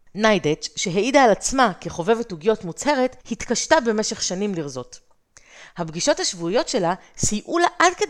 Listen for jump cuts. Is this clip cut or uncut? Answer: cut